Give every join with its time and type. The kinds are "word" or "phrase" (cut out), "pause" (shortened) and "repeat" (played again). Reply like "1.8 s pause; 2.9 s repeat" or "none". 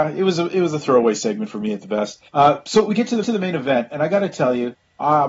2.3 s pause; 3.2 s repeat